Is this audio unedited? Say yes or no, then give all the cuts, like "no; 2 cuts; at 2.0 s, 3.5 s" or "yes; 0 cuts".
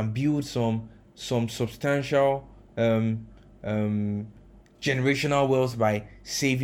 yes; 0 cuts